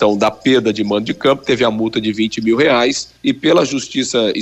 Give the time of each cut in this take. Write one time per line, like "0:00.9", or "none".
0:03.2